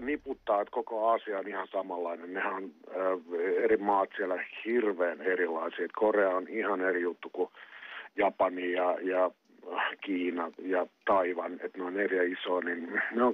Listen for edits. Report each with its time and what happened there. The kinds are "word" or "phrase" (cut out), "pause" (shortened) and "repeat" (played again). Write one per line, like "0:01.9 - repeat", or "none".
none